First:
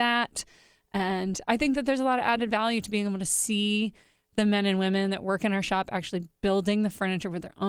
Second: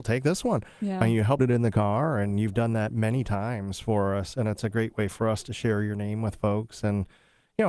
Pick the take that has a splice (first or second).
second